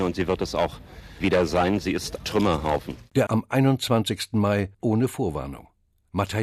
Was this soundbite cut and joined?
yes; 4 cuts; at 1.2 s, 2.2 s, 3.3 s, 4.8 s

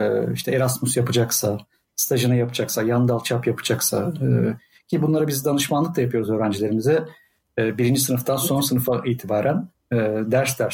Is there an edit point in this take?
no; 0 cuts

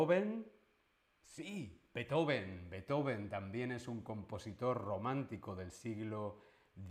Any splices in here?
no; 0 cuts

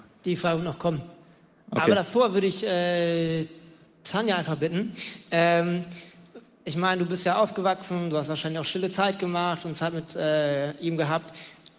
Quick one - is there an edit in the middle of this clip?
no; 0 cuts

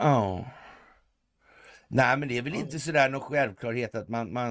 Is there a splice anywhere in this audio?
no; 0 cuts

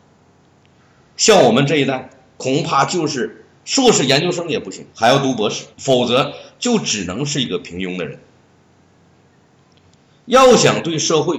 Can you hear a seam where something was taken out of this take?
yes; 2 cuts; at 4.9 s, 5.7 s

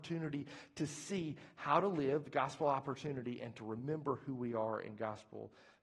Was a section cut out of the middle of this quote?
no; 0 cuts

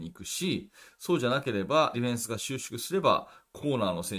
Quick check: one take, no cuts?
no; 1 cut; at 1.9 s

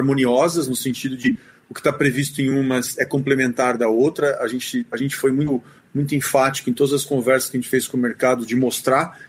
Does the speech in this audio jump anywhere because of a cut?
no; 0 cuts

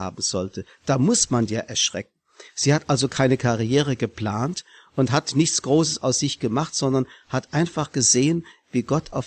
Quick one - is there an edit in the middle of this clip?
no; 0 cuts

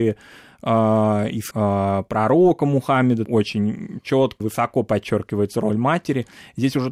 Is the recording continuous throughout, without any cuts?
no; 3 cuts; at 1.5 s, 3.2 s, 4.4 s

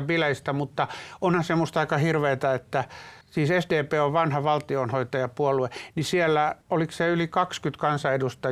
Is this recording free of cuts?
no; 2 cuts; at 3.2 s, 6.6 s

